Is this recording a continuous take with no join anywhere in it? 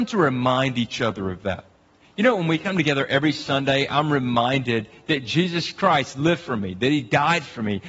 yes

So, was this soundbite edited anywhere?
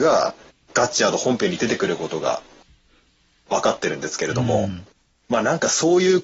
no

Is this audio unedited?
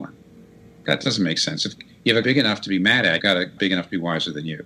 no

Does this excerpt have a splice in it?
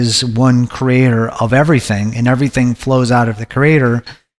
no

